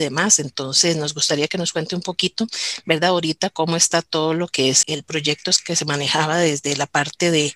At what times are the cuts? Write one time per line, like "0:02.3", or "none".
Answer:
0:04.8

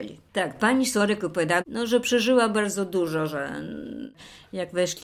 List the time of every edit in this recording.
none

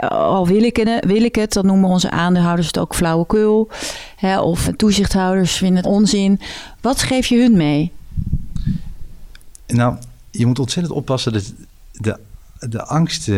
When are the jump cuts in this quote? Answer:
0:04.7
0:05.8

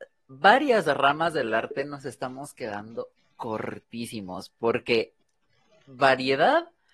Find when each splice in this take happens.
none

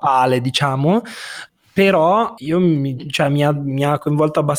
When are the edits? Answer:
0:02.4

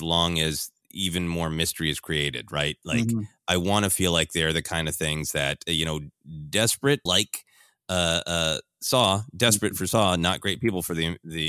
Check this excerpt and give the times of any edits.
0:07.1

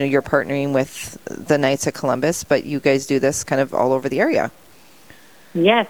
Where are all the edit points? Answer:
none

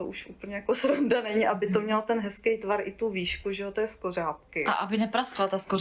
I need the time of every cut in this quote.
none

